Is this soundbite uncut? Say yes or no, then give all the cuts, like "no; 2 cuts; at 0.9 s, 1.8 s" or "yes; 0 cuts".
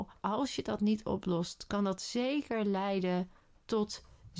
yes; 0 cuts